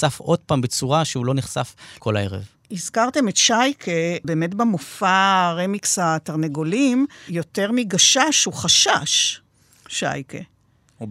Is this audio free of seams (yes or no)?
no